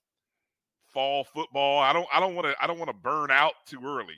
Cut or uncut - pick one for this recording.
uncut